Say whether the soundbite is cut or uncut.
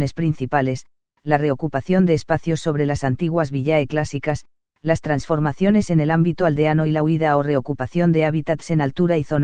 uncut